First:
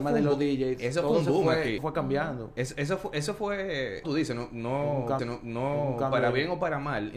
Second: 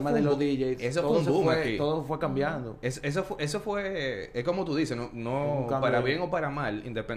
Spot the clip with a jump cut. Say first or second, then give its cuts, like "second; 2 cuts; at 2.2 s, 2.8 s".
first; 3 cuts; at 1.8 s, 4.0 s, 5.2 s